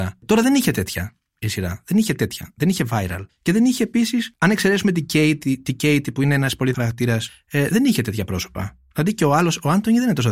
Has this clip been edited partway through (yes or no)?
yes